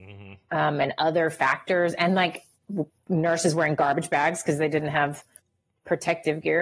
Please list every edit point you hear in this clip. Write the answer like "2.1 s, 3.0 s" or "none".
none